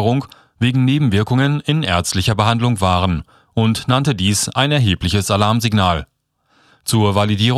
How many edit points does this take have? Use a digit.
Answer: 0